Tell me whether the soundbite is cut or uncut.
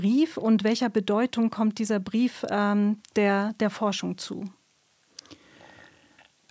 uncut